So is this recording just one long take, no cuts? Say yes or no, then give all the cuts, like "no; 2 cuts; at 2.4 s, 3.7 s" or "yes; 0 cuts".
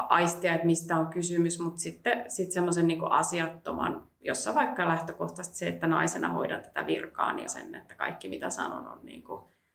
no; 1 cut; at 7.5 s